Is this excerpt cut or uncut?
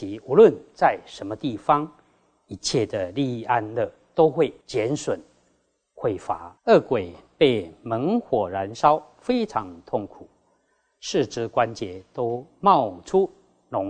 cut